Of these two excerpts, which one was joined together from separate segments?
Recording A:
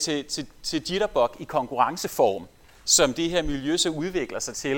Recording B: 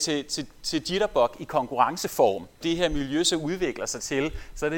B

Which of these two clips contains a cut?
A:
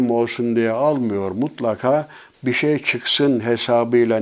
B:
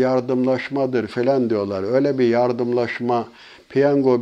A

